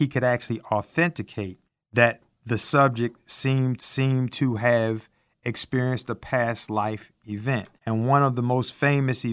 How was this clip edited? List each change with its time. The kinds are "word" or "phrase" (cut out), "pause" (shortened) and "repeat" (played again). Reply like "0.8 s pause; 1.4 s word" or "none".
1.6 s pause; 3.8 s repeat; 7.8 s pause